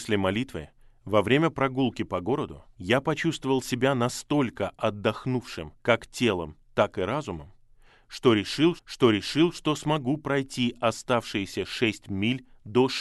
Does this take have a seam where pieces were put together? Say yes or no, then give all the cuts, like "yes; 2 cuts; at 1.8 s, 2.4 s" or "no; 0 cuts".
yes; 3 cuts; at 2.7 s, 5.8 s, 8.8 s